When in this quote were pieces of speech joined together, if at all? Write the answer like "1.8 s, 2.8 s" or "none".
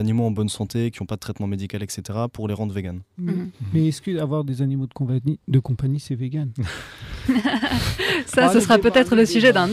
none

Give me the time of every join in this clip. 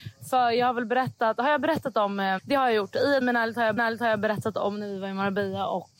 2.4 s, 3.2 s, 3.8 s

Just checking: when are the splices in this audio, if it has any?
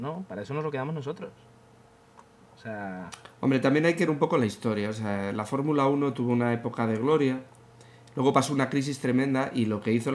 4.1 s

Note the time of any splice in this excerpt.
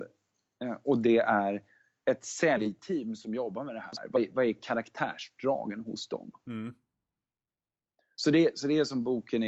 2.0 s

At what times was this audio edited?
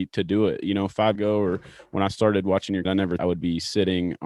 1.1 s, 2.8 s, 3.2 s

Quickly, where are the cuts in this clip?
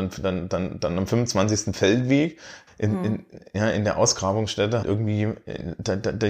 2.7 s, 4.8 s

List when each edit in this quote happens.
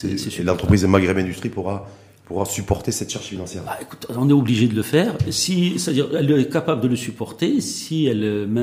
none

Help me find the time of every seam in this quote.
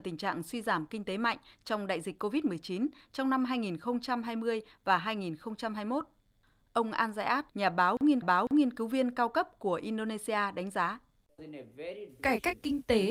7.5 s, 8.2 s

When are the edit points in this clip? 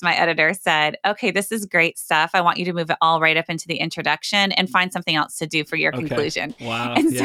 none

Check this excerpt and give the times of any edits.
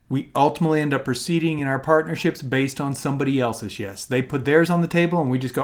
none

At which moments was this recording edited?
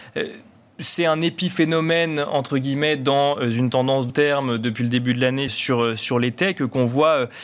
4.1 s, 5.5 s

